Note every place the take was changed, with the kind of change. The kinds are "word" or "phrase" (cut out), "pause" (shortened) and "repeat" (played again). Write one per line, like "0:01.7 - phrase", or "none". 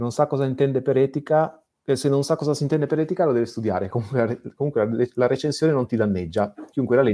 none